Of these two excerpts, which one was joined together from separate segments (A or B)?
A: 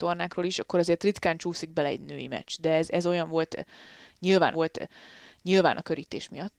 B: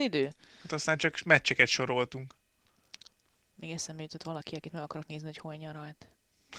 A